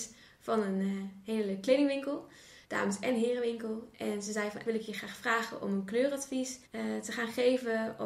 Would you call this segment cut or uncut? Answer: cut